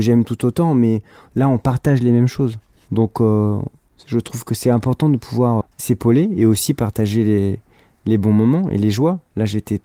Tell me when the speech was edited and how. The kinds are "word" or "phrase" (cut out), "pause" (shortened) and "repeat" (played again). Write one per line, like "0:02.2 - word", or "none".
0:05.6 - word

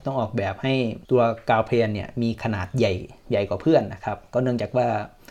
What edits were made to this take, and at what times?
0:01.0 - pause

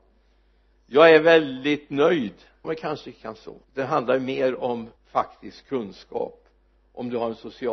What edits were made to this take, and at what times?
0:02.6 - word
0:03.6 - pause
0:05.0 - pause

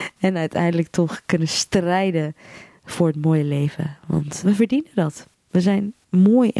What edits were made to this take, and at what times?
0:04.4 - word

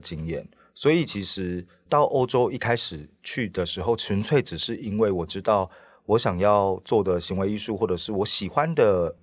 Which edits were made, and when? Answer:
none

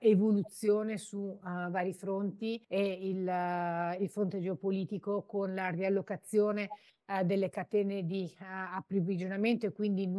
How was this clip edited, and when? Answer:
0:02.6 - pause

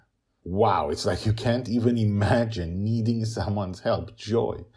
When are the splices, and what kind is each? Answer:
none

